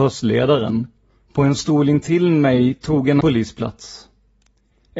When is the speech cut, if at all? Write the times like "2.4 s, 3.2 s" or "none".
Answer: 3.2 s